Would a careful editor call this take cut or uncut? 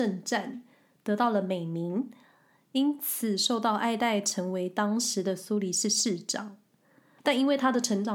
uncut